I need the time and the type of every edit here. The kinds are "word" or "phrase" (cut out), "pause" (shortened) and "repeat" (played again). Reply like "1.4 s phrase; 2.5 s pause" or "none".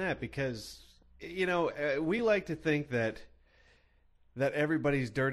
none